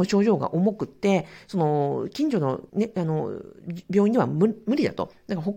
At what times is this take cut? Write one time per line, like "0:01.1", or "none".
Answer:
0:02.7